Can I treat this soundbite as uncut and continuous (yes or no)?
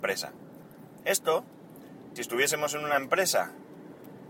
no